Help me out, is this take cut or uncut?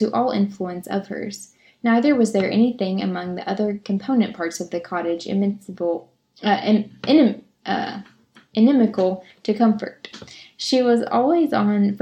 uncut